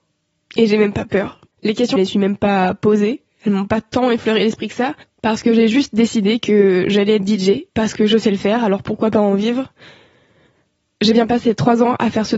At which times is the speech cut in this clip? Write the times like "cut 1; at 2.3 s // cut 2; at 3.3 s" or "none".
cut 1; at 2.0 s // cut 2; at 5.0 s // cut 3; at 7.7 s